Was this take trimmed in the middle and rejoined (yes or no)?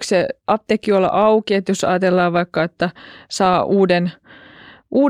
no